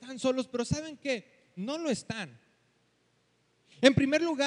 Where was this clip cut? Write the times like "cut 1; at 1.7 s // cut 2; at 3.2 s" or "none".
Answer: none